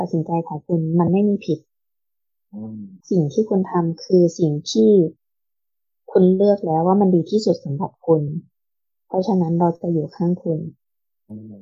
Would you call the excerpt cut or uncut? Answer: cut